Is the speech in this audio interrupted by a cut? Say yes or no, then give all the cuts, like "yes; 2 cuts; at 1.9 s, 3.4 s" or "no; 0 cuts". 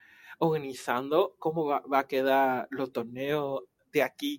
no; 0 cuts